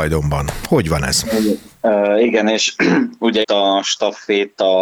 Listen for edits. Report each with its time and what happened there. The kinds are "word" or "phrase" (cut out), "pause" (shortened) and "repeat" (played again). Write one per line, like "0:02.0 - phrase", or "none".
0:03.4 - word